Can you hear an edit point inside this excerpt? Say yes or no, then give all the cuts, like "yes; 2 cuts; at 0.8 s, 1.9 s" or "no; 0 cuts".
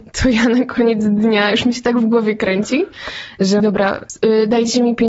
yes; 1 cut; at 3.6 s